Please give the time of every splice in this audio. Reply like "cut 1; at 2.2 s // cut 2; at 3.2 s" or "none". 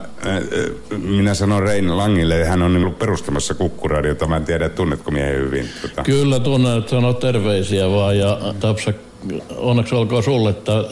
cut 1; at 2.8 s // cut 2; at 8.6 s

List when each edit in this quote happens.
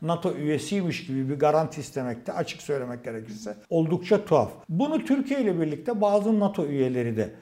cut 1; at 3.6 s // cut 2; at 4.6 s

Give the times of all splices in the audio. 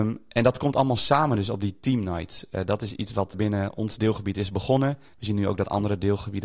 cut 1; at 3.3 s // cut 2; at 5.1 s

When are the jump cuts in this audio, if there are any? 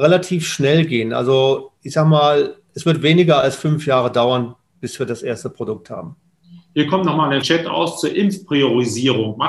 cut 1; at 1.8 s // cut 2; at 7.4 s

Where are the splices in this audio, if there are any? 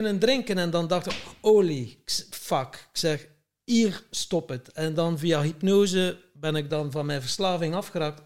none

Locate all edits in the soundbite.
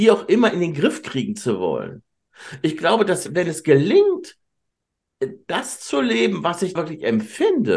cut 1; at 6.7 s

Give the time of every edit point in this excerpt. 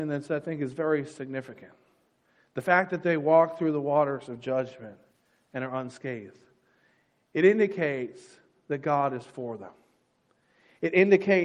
none

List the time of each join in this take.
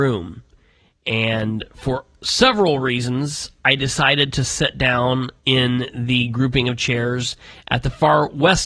cut 1; at 5.4 s

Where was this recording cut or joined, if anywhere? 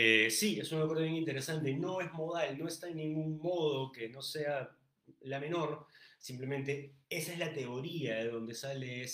cut 1; at 7.0 s

